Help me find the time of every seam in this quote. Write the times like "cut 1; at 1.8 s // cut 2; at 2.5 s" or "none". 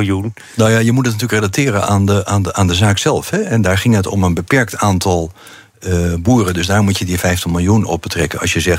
none